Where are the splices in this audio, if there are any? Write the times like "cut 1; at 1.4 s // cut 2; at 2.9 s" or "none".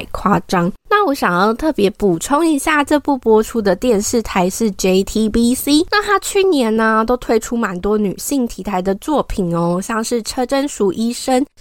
none